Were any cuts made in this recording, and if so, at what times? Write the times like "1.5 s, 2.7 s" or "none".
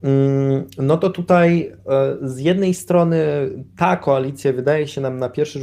none